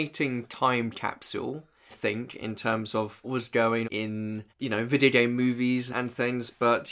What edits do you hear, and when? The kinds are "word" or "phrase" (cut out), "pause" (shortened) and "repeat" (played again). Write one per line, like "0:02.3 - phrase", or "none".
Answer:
0:01.9 - word
0:03.2 - word
0:03.8 - word
0:04.5 - pause
0:05.9 - word